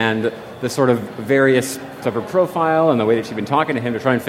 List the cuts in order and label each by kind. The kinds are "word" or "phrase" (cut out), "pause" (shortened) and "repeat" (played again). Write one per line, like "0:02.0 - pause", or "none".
0:02.0 - word

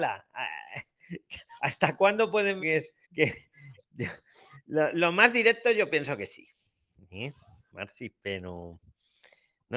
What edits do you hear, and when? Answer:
0:02.6 - phrase
0:03.0 - pause

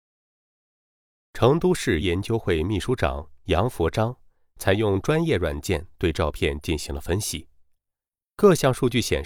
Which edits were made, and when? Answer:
0:02.0 - word

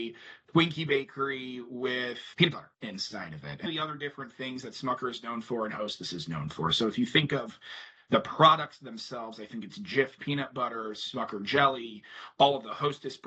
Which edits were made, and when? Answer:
0:02.3 - word
0:02.7 - pause
0:03.7 - word

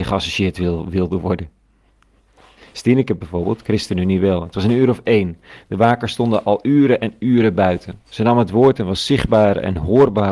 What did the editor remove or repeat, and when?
none

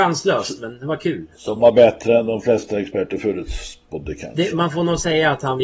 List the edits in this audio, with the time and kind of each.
none

